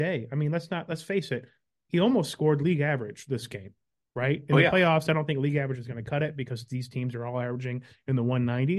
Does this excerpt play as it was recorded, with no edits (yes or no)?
yes